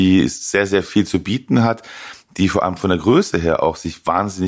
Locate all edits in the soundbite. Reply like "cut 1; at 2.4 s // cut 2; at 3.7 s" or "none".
none